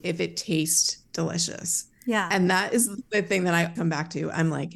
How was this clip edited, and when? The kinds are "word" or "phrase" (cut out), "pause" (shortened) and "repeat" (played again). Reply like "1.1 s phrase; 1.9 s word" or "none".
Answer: 2.0 s pause; 3.8 s word